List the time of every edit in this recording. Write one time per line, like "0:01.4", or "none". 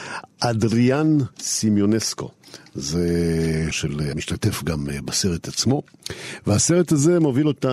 0:01.3
0:03.7
0:04.1